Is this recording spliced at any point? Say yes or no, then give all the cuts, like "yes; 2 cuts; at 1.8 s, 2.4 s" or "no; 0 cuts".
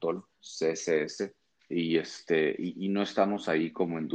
yes; 1 cut; at 1.6 s